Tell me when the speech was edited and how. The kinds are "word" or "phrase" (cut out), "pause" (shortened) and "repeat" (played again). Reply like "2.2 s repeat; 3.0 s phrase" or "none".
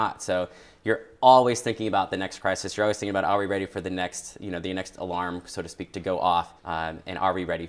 6.6 s pause